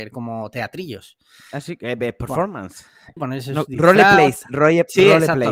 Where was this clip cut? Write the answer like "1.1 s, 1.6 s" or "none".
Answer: 3.2 s